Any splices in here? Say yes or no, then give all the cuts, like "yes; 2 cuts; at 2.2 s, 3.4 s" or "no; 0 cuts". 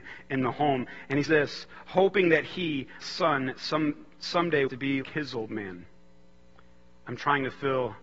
yes; 4 cuts; at 1.3 s, 3.0 s, 4.7 s, 5.0 s